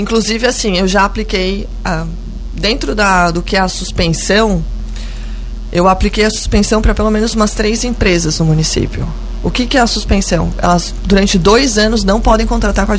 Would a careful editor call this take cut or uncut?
uncut